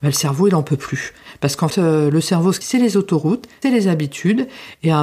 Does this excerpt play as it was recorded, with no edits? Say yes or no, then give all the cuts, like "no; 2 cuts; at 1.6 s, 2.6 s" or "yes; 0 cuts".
no; 3 cuts; at 1.7 s, 2.6 s, 3.6 s